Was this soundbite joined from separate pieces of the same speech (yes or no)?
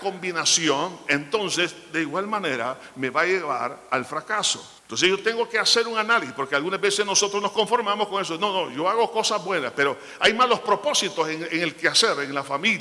yes